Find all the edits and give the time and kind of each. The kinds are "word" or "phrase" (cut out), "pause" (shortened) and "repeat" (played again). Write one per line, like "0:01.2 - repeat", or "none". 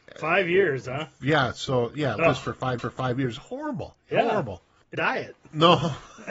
0:02.2 - phrase
0:02.8 - repeat
0:04.0 - pause
0:04.9 - phrase